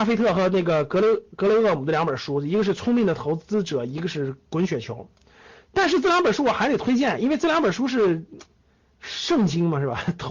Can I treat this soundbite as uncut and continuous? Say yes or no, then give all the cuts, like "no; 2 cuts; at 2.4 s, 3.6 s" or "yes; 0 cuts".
yes; 0 cuts